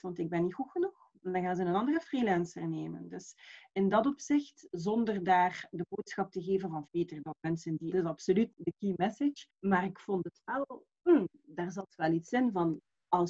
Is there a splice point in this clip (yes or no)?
yes